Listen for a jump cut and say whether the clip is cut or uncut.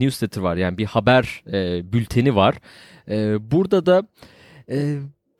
uncut